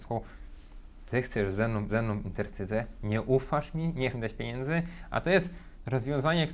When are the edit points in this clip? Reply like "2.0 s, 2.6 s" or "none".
1.9 s, 4.1 s

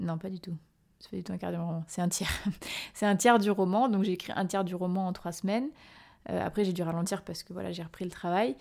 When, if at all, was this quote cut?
none

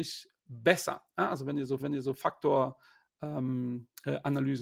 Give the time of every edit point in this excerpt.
1.8 s

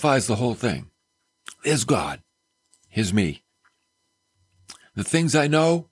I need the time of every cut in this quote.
2.4 s

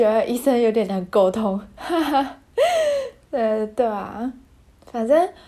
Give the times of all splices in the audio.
none

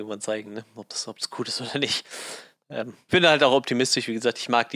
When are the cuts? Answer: 3.1 s

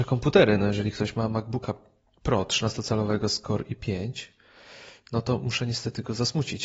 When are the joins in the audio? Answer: none

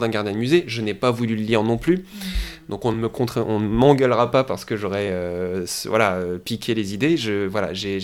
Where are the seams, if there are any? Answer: none

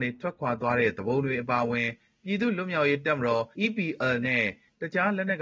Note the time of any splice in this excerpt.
3.5 s

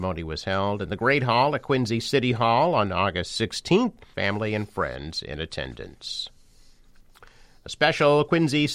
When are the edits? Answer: 4.1 s

